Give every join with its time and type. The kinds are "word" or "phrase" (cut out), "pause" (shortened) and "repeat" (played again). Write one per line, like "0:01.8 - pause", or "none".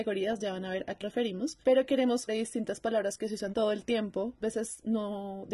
0:01.0 - word
0:01.6 - pause
0:02.3 - phrase
0:03.5 - word
0:04.4 - word